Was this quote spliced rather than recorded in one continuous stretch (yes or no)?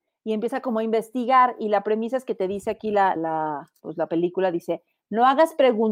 yes